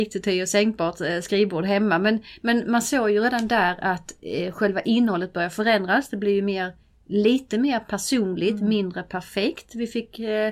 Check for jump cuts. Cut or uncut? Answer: uncut